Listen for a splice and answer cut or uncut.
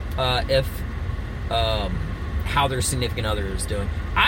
uncut